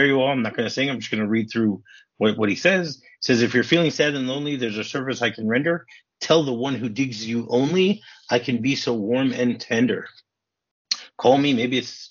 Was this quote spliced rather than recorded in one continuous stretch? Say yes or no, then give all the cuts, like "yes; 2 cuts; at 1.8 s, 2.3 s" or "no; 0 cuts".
no; 0 cuts